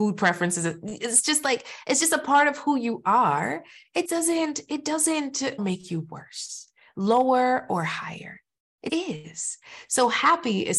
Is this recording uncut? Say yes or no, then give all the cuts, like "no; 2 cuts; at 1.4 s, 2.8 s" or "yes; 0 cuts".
no; 3 cuts; at 4.1 s, 5.6 s, 8.9 s